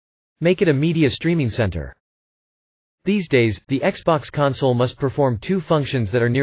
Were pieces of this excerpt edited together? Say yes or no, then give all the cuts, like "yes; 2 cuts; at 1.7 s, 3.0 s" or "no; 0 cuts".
no; 0 cuts